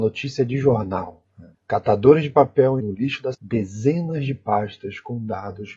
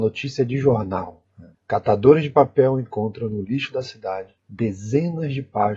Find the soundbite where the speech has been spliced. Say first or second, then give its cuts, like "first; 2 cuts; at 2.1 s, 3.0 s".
first; 2 cuts; at 2.8 s, 3.3 s